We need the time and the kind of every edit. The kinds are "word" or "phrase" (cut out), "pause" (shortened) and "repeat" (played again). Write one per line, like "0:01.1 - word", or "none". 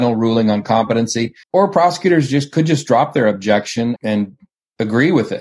0:01.4 - pause
0:04.0 - word